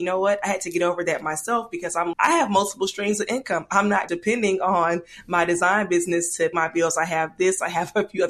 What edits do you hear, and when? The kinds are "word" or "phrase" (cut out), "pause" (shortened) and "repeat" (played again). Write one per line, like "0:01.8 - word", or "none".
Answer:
0:02.1 - word
0:04.1 - word
0:06.5 - word